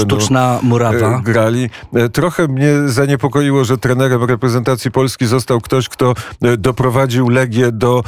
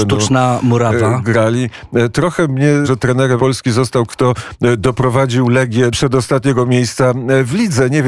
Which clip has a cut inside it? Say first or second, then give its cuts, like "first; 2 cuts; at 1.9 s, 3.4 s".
second; 4 cuts; at 2.8 s, 3.4 s, 4.1 s, 5.9 s